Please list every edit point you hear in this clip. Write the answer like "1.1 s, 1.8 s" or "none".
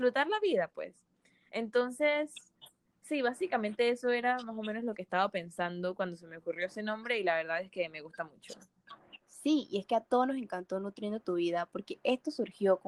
2.8 s, 9.2 s